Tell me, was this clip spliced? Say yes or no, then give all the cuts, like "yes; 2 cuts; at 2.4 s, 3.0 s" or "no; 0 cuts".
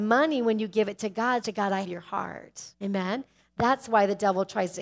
yes; 3 cuts; at 1.4 s, 1.8 s, 2.7 s